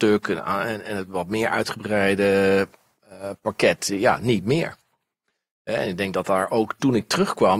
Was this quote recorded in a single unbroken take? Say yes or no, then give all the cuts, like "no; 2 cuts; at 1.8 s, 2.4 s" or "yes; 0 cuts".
yes; 0 cuts